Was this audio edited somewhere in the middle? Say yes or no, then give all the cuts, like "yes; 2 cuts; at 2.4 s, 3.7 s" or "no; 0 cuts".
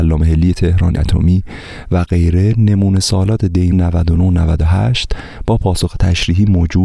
yes; 2 cuts; at 1.0 s, 3.7 s